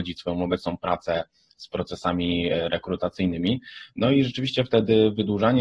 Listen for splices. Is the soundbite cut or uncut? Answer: uncut